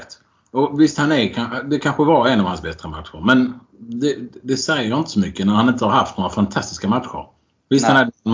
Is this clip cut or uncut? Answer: uncut